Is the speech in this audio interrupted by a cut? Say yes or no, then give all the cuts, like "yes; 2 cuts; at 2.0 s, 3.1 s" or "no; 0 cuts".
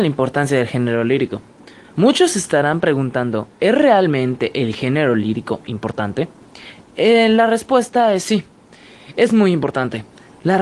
yes; 1 cut; at 6.9 s